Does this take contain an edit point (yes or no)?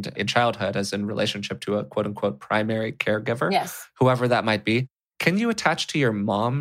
no